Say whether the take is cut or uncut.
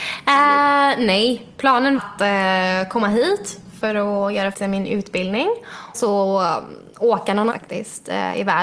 cut